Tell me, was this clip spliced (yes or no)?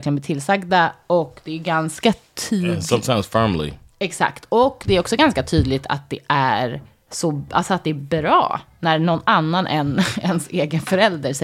no